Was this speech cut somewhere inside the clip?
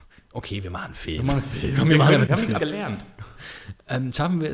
yes; 2 cuts; at 2.3 s, 2.6 s

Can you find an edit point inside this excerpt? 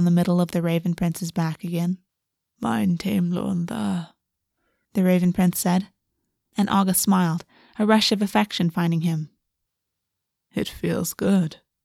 yes; 1 cut; at 2.2 s

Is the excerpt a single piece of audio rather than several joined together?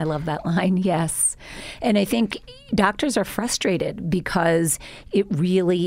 yes; 0 cuts

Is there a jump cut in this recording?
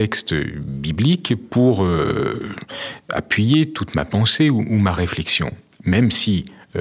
no; 0 cuts

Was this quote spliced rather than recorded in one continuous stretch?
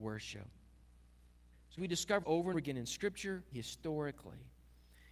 yes; 4 cuts; at 1.8 s, 2.2 s, 2.5 s, 3.5 s

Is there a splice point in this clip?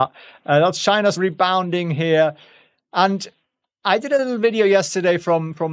yes; 1 cut; at 1.1 s

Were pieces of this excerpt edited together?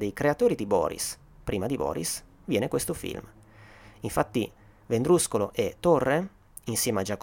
no; 0 cuts

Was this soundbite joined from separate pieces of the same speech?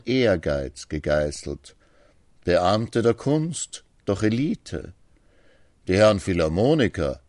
no; 0 cuts

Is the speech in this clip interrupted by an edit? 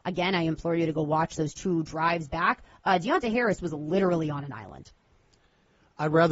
no; 0 cuts

